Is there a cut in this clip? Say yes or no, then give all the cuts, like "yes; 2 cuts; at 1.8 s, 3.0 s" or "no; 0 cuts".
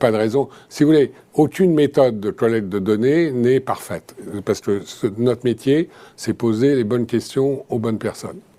no; 0 cuts